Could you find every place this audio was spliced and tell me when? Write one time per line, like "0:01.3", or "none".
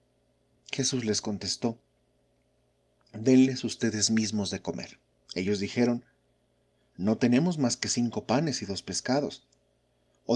0:05.1